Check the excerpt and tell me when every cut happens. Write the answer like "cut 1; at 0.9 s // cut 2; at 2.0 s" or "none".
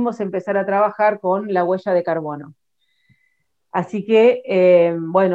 none